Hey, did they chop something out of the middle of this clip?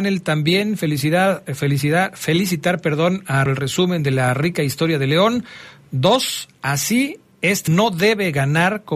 yes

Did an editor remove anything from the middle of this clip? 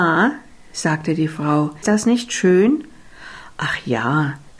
yes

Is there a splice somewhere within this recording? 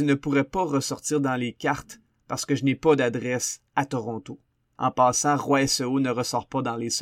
no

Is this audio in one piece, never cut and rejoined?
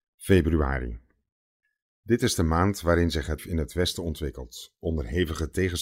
no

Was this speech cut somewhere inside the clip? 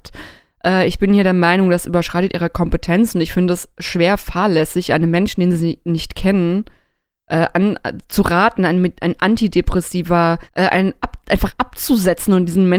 yes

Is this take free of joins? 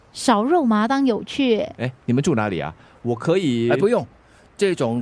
yes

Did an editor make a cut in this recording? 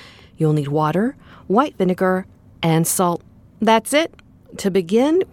no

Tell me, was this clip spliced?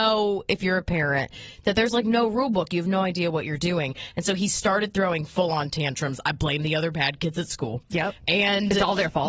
no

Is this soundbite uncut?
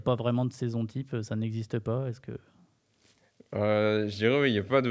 yes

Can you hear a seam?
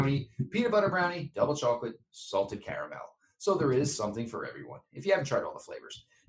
no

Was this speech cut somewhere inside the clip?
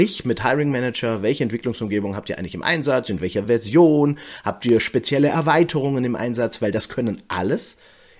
no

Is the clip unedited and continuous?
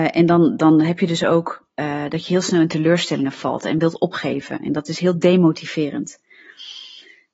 yes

